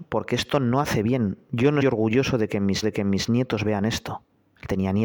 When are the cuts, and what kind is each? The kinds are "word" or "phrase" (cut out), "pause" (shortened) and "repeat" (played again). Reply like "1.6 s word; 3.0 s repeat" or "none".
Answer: 1.8 s word; 2.8 s repeat